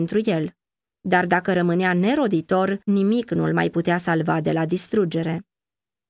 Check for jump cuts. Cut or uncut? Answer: uncut